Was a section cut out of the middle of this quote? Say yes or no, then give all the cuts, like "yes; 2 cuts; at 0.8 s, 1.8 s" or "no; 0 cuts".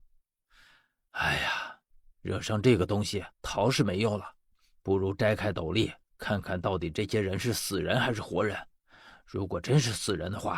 yes; 1 cut; at 3.3 s